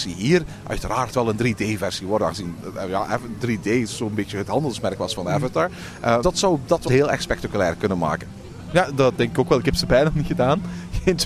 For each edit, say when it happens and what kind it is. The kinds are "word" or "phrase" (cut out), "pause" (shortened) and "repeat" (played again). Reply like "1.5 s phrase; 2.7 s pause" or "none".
6.2 s word; 6.9 s word; 9.2 s word